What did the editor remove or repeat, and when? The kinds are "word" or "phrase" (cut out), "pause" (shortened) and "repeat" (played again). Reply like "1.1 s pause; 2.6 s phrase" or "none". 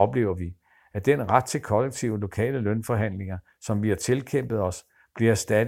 none